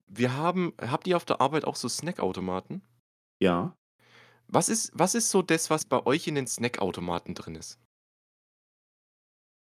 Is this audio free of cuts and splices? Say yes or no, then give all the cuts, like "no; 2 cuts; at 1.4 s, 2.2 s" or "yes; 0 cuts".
yes; 0 cuts